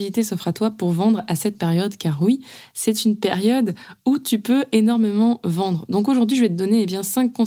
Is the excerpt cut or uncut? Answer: uncut